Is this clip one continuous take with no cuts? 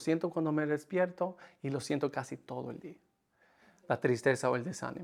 yes; 0 cuts

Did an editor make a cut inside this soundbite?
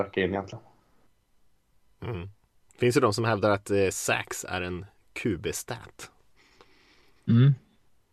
no; 0 cuts

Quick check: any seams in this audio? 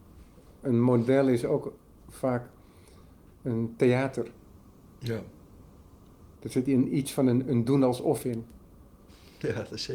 yes; 1 cut; at 6.3 s

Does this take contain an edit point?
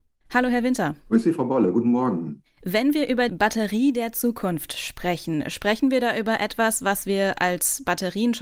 yes; 2 cuts; at 2.5 s, 3.3 s

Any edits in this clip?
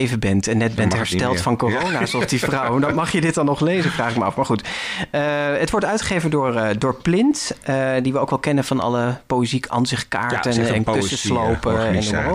no; 0 cuts

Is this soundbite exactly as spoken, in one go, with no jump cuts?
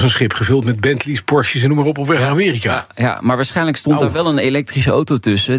yes; 0 cuts

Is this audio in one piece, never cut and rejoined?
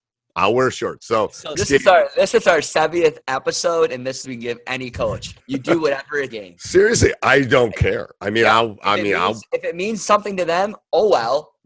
no; 5 cuts; at 1.5 s, 3.2 s, 4.2 s, 5.4 s, 6.3 s

